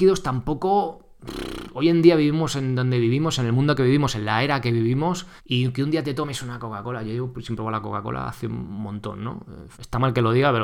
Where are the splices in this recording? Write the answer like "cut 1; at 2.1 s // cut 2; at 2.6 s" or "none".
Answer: cut 1; at 5.4 s // cut 2; at 9.7 s